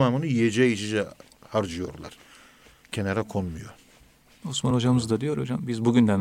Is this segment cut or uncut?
uncut